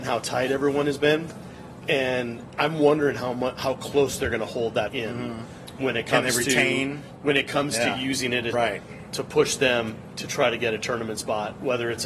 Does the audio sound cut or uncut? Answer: cut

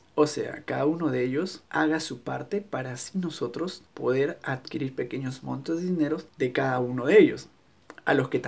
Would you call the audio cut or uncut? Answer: cut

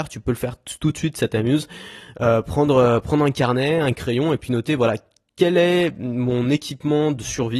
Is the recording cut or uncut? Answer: uncut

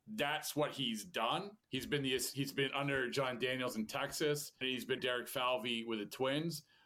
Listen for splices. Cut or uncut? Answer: cut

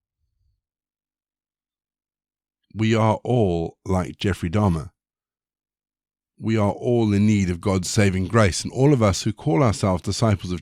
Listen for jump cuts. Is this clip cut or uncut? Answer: uncut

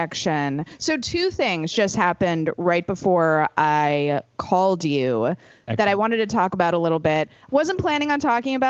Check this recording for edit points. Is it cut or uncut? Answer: uncut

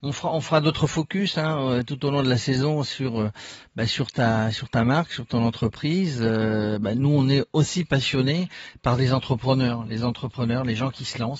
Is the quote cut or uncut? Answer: uncut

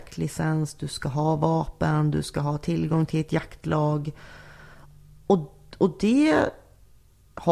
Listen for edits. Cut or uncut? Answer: uncut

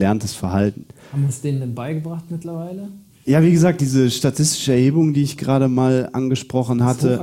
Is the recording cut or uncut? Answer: uncut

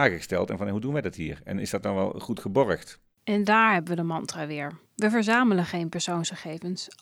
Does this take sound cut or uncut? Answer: cut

